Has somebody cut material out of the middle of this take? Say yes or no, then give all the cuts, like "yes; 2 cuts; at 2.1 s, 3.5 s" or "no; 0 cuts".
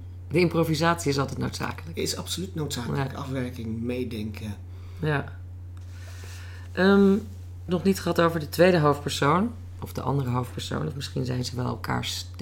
yes; 1 cut; at 7.7 s